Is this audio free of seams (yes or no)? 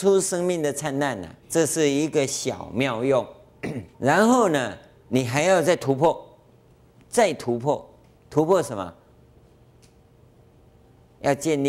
no